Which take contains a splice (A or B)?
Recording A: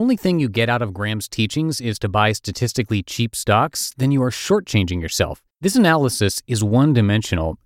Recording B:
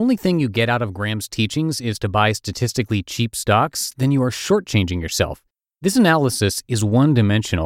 A